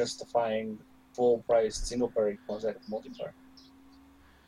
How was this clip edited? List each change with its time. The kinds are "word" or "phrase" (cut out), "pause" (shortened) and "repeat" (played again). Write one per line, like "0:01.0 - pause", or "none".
0:02.3 - phrase
0:02.7 - word